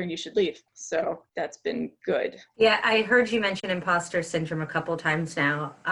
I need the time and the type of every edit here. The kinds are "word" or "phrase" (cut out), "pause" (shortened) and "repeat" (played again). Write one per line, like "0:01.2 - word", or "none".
none